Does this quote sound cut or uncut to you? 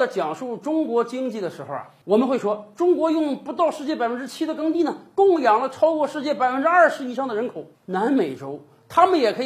cut